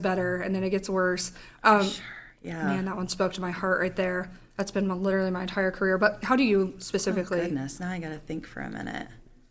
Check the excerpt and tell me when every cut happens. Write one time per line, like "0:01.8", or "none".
none